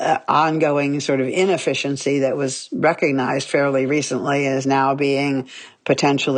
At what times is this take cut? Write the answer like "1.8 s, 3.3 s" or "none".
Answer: none